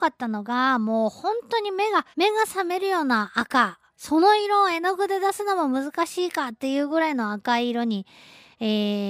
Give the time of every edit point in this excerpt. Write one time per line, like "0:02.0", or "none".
0:02.1
0:03.9

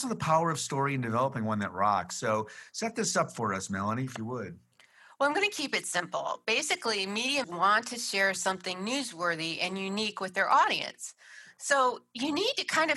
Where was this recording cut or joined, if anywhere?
0:07.4

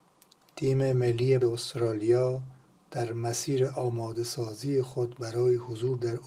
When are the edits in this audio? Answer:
0:01.4

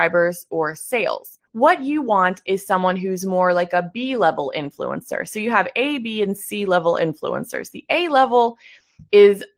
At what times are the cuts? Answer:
0:01.5

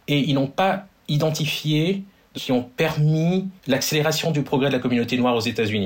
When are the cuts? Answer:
0:02.3
0:03.6

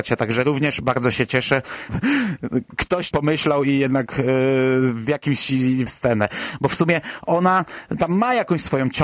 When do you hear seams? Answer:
0:01.9
0:03.1
0:05.9

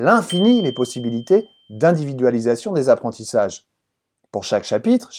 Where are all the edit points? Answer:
none

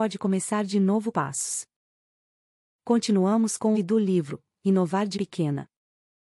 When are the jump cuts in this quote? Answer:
0:01.1
0:03.7
0:05.1

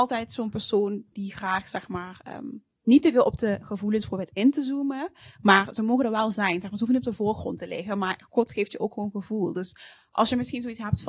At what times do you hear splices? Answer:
none

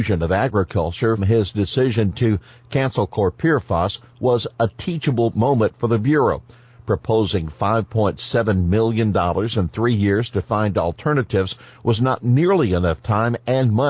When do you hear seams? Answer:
0:01.2

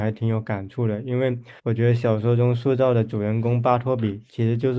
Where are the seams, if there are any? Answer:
0:01.6

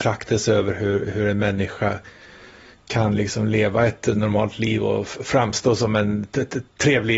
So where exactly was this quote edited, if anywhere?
none

